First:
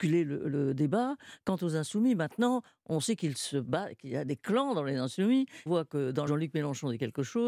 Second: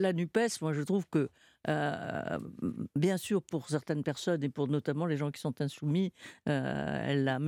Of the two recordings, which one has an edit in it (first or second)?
first